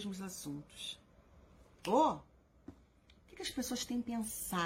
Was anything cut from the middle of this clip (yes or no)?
no